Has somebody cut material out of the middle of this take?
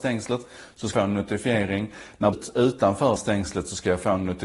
yes; 3 cuts; at 0.9 s, 2.3 s, 3.2 s

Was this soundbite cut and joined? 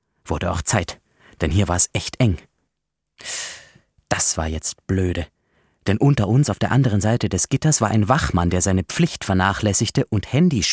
no; 0 cuts

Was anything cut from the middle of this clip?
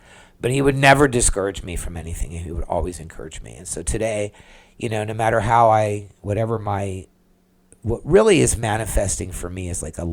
no; 0 cuts

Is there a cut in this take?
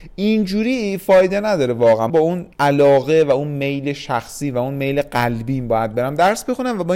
yes; 2 cuts; at 2.1 s, 2.5 s

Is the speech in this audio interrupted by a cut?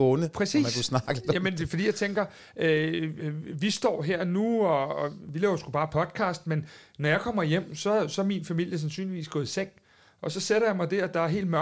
no; 0 cuts

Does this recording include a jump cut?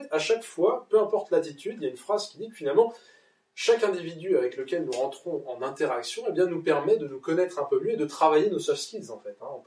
no; 0 cuts

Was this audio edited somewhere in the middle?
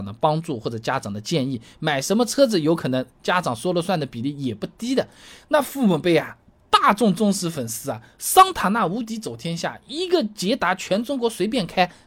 no; 0 cuts

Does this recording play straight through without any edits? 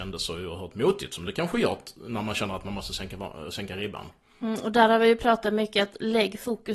yes; 0 cuts

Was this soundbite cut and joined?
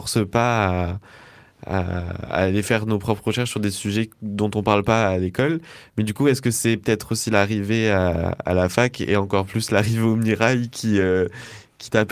no; 0 cuts

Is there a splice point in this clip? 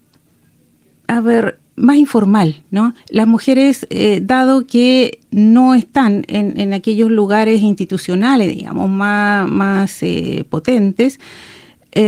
yes; 2 cuts; at 3.0 s, 5.2 s

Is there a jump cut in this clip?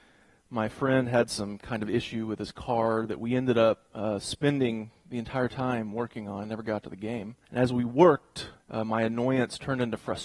yes; 2 cuts; at 7.4 s, 8.6 s

